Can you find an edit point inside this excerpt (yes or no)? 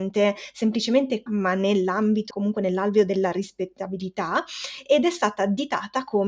yes